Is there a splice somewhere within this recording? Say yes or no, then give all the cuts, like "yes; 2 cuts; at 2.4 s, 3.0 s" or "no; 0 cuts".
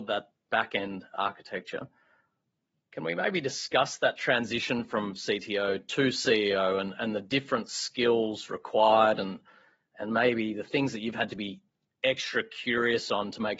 no; 0 cuts